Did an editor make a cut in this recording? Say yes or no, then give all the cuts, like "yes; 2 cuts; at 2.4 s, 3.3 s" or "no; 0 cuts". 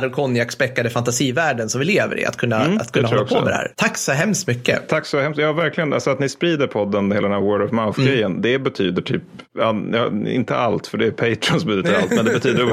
no; 0 cuts